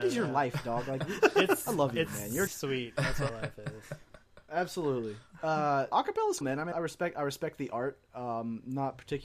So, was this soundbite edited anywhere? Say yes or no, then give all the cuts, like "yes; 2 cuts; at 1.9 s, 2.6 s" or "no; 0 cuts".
yes; 6 cuts; at 1.2 s, 2.5 s, 3.3 s, 5.9 s, 6.4 s, 6.7 s